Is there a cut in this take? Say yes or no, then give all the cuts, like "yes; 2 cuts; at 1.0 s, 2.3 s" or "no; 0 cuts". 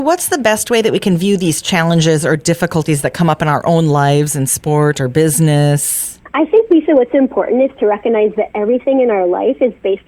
no; 0 cuts